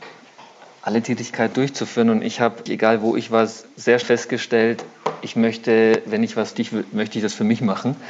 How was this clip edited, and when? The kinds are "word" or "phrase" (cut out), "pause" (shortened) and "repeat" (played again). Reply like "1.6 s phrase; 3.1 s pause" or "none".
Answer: 1.5 s word; 2.7 s word; 4.0 s word; 6.5 s phrase